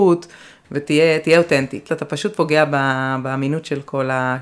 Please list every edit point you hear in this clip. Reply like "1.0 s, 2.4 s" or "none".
1.9 s